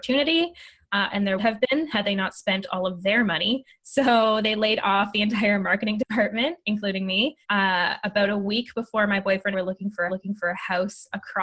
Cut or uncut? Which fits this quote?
cut